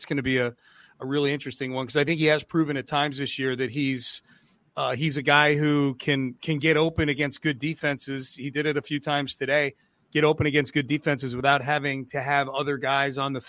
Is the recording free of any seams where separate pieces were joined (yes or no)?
yes